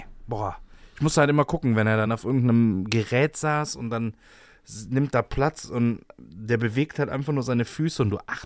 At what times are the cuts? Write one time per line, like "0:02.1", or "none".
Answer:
none